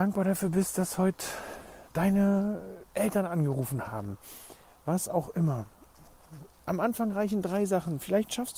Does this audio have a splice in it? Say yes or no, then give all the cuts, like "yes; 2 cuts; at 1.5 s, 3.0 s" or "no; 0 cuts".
no; 0 cuts